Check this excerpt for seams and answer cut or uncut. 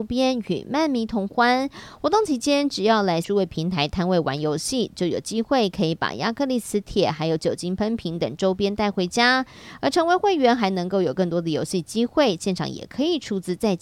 cut